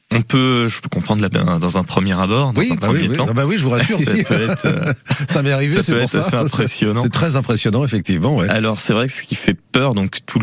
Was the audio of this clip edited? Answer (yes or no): yes